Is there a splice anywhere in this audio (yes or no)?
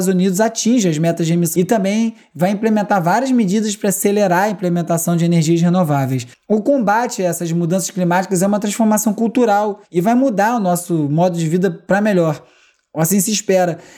yes